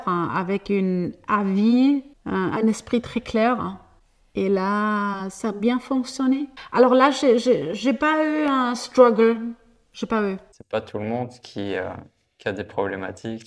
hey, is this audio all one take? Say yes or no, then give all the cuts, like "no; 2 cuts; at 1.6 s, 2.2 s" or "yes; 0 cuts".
yes; 0 cuts